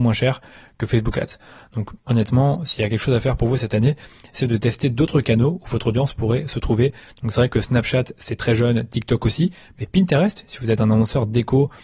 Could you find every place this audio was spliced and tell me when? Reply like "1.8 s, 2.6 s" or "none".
none